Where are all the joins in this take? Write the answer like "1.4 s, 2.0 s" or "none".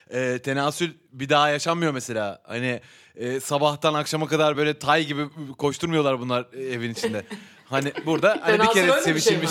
none